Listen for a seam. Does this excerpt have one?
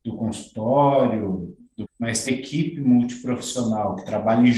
yes; 2 cuts; at 1.8 s, 2.3 s

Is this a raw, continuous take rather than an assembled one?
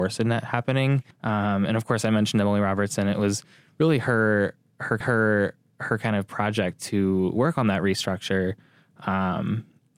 no; 2 cuts; at 1.1 s, 5.0 s

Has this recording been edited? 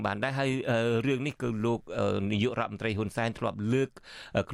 no; 0 cuts

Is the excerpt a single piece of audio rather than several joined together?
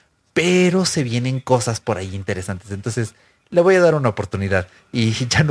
yes; 0 cuts

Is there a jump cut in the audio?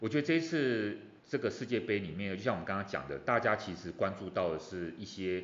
yes; 1 cut; at 1.2 s

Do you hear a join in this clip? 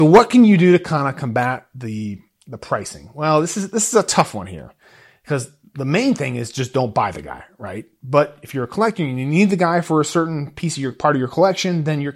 no; 0 cuts

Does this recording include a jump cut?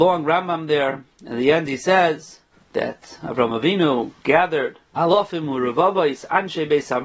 yes; 2 cuts; at 2.5 s, 4.9 s

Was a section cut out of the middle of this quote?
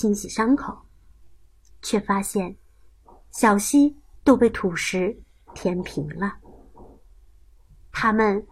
yes; 1 cut; at 4.2 s

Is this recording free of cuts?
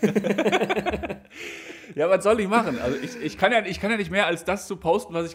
yes; 0 cuts

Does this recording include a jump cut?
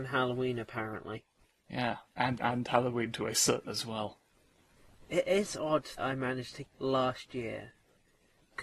yes; 5 cuts; at 1.4 s, 2.4 s, 3.6 s, 6.0 s, 6.6 s

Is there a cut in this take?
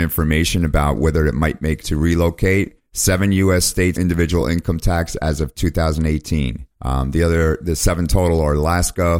yes; 4 cuts; at 1.8 s, 2.8 s, 3.9 s, 6.7 s

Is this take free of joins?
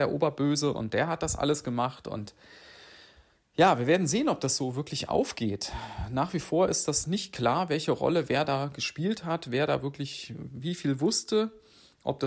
yes; 0 cuts

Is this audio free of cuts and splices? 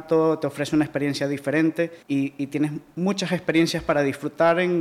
no; 1 cut; at 2.0 s

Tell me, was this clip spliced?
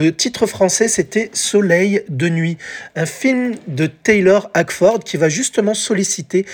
no; 0 cuts

